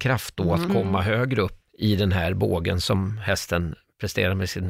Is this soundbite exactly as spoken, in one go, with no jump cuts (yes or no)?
no